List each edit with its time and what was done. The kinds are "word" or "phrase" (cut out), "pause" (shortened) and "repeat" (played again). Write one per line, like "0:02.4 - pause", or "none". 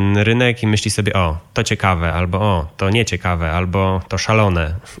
none

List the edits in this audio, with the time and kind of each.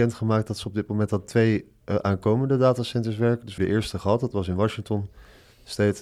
0:03.6 - phrase

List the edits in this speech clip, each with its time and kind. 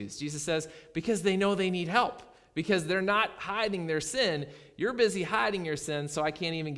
none

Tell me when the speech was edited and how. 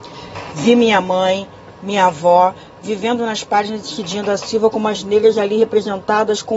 none

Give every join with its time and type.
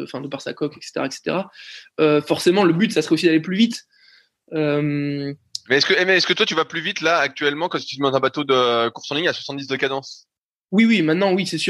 none

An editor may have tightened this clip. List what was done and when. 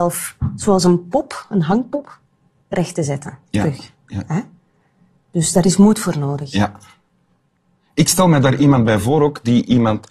none

